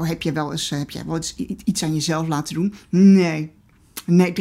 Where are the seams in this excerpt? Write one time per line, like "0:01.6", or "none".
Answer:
none